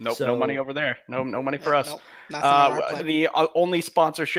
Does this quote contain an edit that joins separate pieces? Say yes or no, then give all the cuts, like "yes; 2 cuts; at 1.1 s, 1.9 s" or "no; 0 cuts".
yes; 1 cut; at 3.0 s